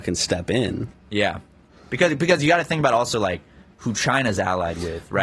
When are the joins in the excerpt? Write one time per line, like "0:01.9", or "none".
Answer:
none